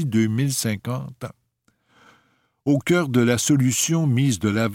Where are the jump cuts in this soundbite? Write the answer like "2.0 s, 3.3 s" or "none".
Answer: none